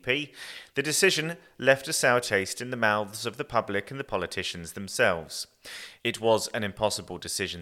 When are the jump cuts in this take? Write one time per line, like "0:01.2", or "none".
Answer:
none

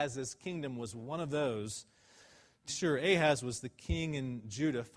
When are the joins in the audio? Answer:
0:02.7

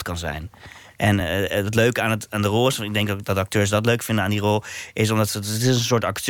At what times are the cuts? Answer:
none

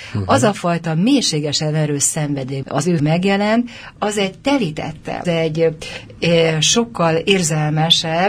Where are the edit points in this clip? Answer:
0:02.6
0:03.0
0:04.0
0:05.2

